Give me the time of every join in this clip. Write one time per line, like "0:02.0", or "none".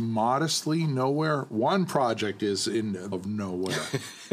0:03.1